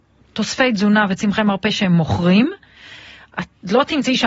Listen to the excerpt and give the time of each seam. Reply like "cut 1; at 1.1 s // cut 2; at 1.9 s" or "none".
none